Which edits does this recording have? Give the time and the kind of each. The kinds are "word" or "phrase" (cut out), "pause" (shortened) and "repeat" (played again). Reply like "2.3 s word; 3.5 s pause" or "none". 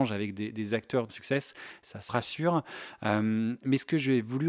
1.1 s phrase; 2.1 s phrase